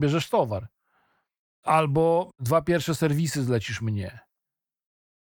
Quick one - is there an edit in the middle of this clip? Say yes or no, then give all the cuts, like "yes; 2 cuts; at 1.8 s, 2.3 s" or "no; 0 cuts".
no; 0 cuts